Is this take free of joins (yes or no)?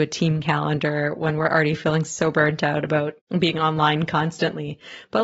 yes